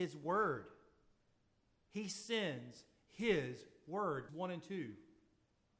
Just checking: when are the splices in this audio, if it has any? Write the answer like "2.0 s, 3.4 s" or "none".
4.3 s